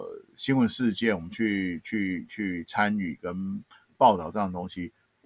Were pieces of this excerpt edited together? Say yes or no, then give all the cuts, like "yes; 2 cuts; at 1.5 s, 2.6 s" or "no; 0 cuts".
no; 0 cuts